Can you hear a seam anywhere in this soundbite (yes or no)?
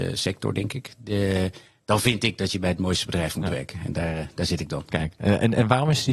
no